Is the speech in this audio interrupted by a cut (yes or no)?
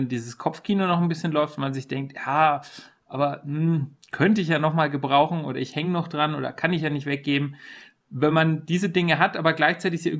no